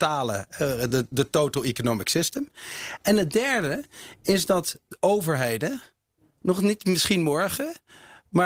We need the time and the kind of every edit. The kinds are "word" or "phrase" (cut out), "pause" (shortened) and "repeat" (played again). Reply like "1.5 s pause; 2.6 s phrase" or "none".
none